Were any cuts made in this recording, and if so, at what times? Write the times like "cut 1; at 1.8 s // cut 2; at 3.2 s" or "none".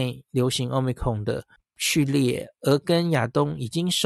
cut 1; at 1.6 s